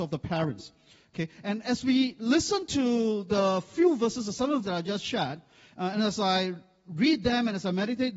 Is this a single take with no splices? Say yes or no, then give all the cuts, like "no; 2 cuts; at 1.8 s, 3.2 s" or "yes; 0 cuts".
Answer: no; 1 cut; at 4.6 s